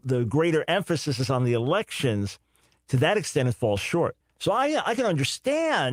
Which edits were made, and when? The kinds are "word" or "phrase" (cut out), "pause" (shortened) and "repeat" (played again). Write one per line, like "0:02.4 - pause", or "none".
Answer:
0:04.2 - pause